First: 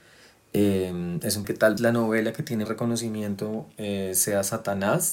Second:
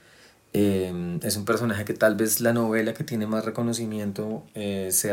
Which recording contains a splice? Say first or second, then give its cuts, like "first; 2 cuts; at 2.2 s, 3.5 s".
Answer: first; 3 cuts; at 1.4 s, 1.8 s, 2.7 s